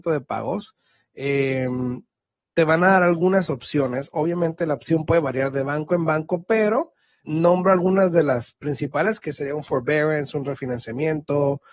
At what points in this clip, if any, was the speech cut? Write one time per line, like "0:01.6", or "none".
0:07.2